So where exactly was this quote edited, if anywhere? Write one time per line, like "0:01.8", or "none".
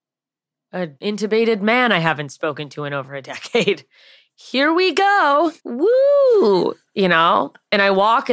0:01.0
0:05.6